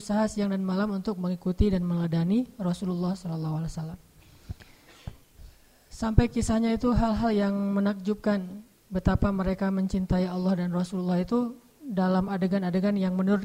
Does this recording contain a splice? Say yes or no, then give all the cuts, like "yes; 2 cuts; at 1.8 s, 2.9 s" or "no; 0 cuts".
no; 0 cuts